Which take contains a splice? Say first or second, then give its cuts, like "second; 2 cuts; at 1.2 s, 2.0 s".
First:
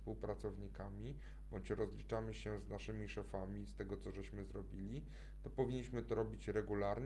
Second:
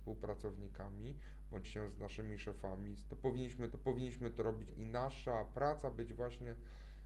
second; 5 cuts; at 1.6 s, 3.1 s, 3.7 s, 4.7 s, 5.9 s